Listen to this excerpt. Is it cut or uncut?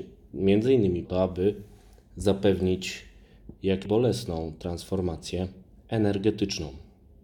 cut